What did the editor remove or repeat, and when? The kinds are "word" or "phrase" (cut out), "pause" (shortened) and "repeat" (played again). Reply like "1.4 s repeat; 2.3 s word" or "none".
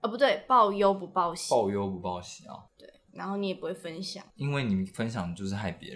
2.7 s pause; 4.3 s pause

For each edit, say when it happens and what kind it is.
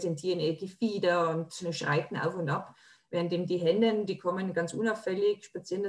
none

